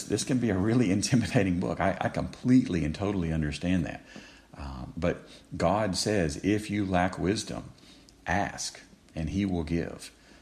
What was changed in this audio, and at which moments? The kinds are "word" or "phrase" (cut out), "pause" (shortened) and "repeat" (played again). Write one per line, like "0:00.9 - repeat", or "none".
none